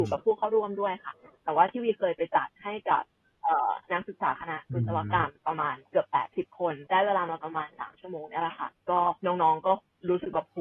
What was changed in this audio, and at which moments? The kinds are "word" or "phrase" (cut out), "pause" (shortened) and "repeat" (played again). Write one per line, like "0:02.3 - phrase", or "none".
0:05.4 - pause
0:05.9 - pause
0:06.9 - pause
0:09.2 - pause